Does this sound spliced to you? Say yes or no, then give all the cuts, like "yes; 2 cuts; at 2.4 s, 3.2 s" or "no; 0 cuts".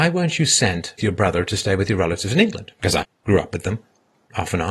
yes; 2 cuts; at 1.0 s, 3.0 s